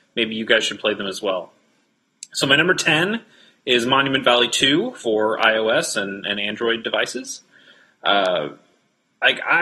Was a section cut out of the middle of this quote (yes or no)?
no